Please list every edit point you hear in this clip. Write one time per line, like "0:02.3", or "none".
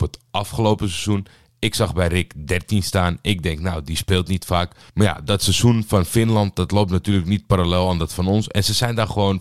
none